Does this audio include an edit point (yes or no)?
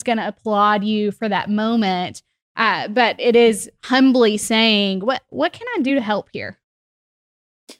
no